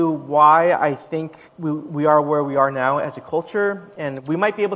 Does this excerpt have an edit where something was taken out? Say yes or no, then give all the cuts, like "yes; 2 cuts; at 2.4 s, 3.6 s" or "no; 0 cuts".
yes; 1 cut; at 1.5 s